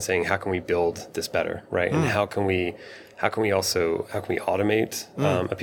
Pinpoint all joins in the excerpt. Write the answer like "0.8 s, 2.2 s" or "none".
none